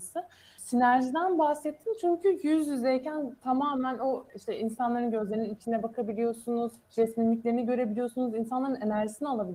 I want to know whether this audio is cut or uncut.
cut